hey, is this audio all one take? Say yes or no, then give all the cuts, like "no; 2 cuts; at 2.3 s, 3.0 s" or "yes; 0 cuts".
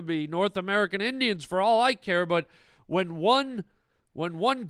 yes; 0 cuts